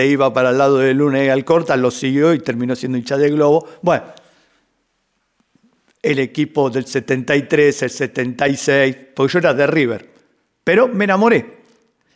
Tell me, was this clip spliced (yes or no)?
no